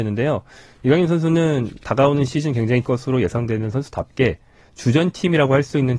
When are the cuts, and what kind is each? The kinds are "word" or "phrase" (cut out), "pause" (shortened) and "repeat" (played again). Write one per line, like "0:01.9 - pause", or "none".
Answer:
0:02.8 - word